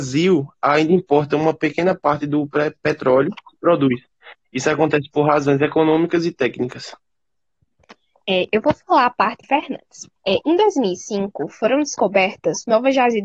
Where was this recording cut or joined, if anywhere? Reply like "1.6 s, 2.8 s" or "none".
3.4 s, 9.4 s, 10.2 s